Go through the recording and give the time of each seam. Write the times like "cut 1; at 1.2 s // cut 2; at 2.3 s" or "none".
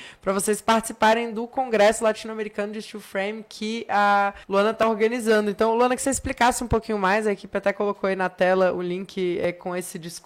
cut 1; at 4.4 s // cut 2; at 6.0 s